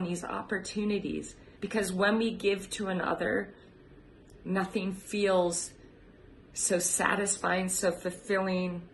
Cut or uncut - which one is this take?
cut